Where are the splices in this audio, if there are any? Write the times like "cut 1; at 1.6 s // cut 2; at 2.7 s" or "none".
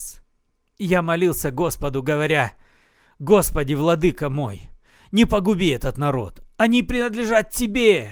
none